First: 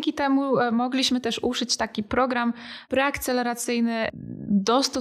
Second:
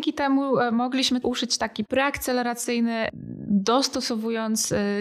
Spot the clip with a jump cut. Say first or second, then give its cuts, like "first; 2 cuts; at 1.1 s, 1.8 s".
second; 2 cuts; at 1.2 s, 1.9 s